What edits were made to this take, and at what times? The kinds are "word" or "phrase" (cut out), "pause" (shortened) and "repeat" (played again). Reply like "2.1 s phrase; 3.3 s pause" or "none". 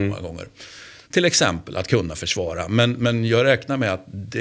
1.0 s pause